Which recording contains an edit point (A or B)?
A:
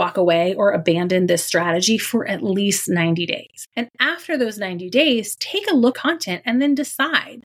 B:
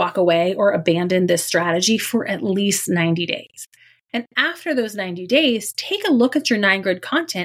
A